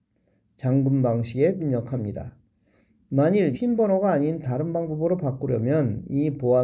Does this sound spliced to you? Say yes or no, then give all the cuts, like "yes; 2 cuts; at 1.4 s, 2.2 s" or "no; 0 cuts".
yes; 2 cuts; at 1.6 s, 3.5 s